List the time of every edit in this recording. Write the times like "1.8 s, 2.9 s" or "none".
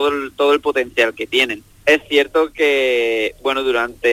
1.7 s